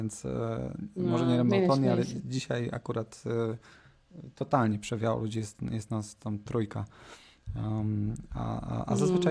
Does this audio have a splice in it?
no; 0 cuts

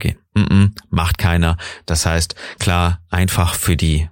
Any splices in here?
yes; 1 cut; at 2.6 s

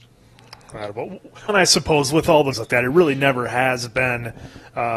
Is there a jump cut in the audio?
yes; 2 cuts; at 1.5 s, 2.5 s

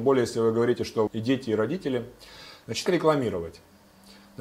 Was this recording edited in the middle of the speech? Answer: yes; 2 cuts; at 1.1 s, 2.9 s

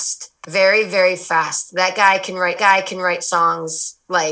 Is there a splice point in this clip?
yes; 1 cut; at 2.6 s

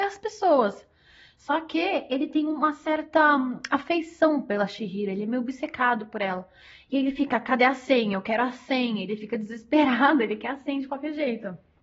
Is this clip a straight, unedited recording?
yes; 0 cuts

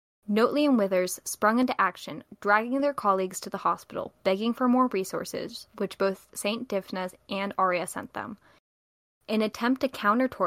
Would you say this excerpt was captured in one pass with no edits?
yes; 0 cuts

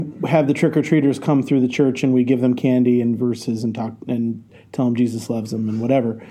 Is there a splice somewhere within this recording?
no; 0 cuts

